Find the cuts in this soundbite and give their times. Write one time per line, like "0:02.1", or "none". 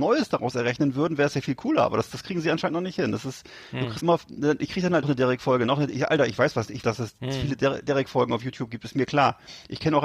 0:04.0
0:05.0
0:06.8